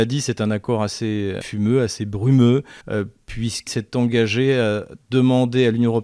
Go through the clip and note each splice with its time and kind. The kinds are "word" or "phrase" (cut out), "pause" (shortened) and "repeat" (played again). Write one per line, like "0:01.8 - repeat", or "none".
0:01.4 - word
0:02.8 - pause
0:03.7 - word